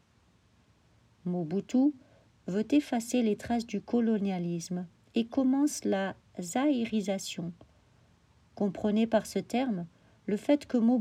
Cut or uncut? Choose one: uncut